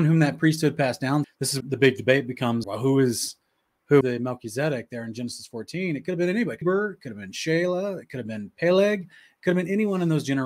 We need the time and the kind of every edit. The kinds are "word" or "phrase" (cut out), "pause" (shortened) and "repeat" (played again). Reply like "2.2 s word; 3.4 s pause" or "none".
1.2 s word; 1.6 s word; 2.6 s word; 4.0 s word; 6.6 s phrase